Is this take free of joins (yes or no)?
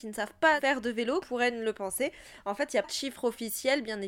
no